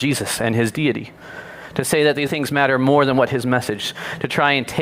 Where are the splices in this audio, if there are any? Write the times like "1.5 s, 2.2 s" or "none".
2.3 s